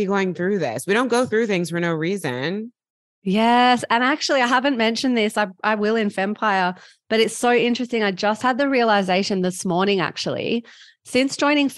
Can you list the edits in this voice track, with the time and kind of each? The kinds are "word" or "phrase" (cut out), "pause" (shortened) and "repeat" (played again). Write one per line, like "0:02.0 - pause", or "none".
none